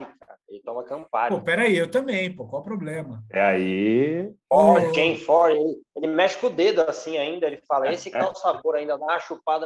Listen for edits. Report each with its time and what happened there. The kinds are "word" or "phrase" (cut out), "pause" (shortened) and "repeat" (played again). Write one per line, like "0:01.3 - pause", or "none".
none